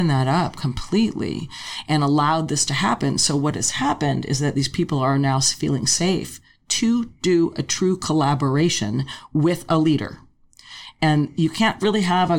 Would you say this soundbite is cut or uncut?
uncut